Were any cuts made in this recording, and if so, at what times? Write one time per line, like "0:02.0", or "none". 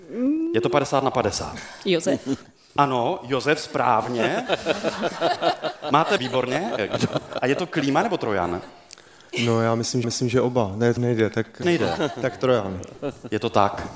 0:06.2
0:10.0
0:11.0
0:11.6